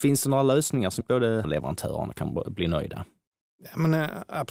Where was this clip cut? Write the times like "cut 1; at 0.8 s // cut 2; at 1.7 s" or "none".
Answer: cut 1; at 1.0 s // cut 2; at 1.4 s // cut 3; at 3.3 s

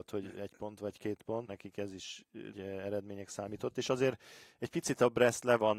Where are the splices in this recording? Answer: cut 1; at 1.5 s // cut 2; at 2.5 s

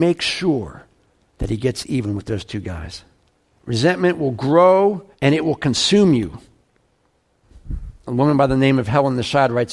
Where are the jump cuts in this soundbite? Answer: cut 1; at 1.1 s // cut 2; at 3.3 s // cut 3; at 5.1 s

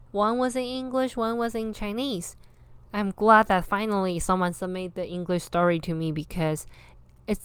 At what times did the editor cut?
none

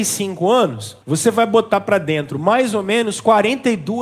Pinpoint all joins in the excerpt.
cut 1; at 1.0 s

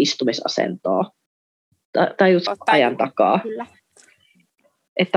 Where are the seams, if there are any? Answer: cut 1; at 2.5 s

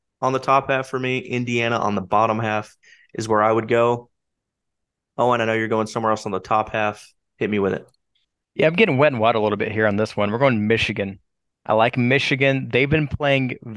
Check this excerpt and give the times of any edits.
none

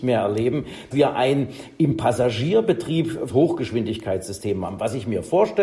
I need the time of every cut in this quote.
cut 1; at 0.9 s // cut 2; at 3.3 s

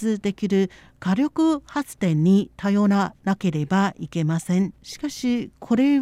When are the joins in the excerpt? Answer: cut 1; at 4.8 s

